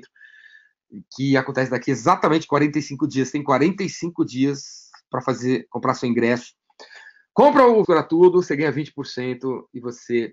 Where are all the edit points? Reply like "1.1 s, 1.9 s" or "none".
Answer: 7.8 s